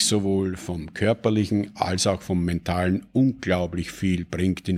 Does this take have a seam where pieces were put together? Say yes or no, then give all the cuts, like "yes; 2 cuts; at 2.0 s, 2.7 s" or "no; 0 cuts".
no; 0 cuts